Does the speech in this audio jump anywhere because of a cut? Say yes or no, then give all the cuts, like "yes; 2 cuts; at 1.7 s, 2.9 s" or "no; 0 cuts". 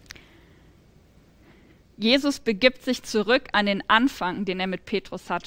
no; 0 cuts